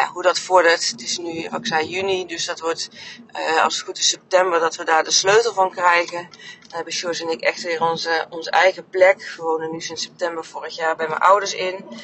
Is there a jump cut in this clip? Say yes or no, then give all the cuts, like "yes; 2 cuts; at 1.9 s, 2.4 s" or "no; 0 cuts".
no; 0 cuts